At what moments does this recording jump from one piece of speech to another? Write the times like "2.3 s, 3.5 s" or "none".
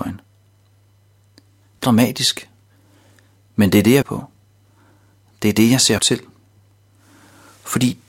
1.8 s, 4.0 s, 6.0 s